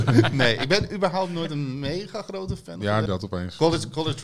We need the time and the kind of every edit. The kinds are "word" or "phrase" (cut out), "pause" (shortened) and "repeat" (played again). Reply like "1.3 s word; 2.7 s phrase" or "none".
3.1 s phrase